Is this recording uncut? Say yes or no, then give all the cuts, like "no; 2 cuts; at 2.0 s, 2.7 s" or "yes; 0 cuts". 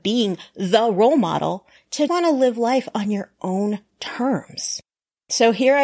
no; 1 cut; at 2.1 s